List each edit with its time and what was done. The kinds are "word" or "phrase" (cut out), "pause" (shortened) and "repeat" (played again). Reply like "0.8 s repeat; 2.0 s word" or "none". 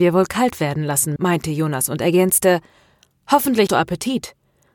1.2 s word; 3.7 s word